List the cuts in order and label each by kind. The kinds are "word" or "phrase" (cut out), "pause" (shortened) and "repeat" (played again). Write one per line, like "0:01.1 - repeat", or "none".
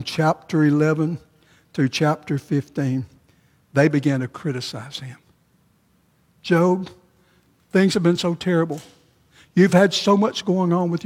none